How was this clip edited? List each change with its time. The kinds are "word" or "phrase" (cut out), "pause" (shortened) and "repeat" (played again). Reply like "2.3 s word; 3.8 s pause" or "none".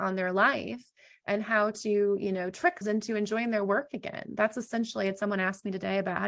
2.8 s word